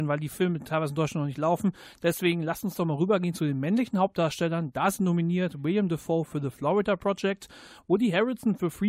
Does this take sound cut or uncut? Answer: uncut